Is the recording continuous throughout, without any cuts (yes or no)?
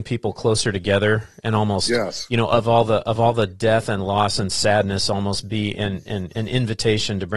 yes